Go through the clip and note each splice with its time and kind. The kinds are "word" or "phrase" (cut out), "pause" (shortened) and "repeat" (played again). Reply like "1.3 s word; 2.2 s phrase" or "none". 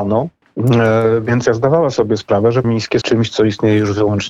1.5 s word; 2.6 s word; 3.0 s word